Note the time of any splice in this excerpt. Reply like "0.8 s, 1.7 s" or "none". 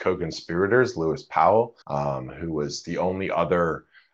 1.8 s

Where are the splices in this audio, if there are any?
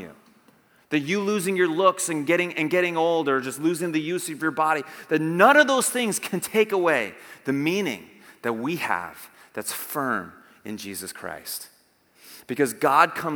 none

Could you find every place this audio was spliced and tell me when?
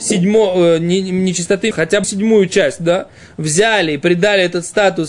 1.7 s, 2.0 s

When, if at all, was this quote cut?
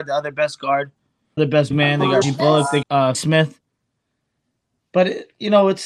1.4 s, 1.7 s, 2.2 s, 2.8 s, 3.1 s

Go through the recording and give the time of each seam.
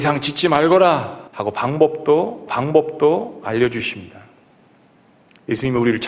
1.3 s, 2.5 s

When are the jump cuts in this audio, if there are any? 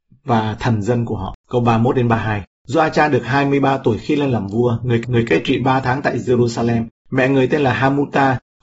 1.4 s, 5.0 s

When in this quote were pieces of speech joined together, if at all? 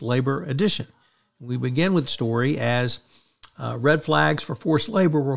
2.0 s

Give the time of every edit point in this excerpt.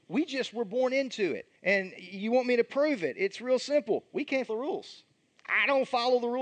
1.6 s, 4.5 s, 5.2 s

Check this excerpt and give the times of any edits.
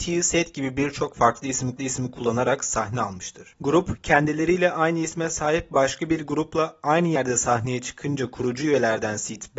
1.8 s

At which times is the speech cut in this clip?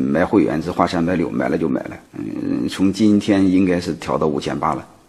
2.1 s

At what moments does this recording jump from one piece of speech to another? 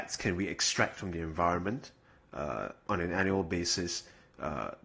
none

